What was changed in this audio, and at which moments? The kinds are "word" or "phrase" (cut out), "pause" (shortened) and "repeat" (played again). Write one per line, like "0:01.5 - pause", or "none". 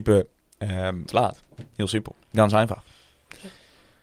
0:01.1 - phrase